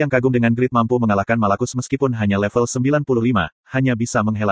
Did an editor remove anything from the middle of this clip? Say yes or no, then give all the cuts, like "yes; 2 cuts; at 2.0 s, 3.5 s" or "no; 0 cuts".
no; 0 cuts